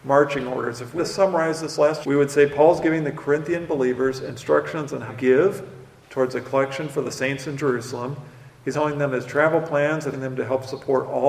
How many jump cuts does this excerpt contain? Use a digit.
5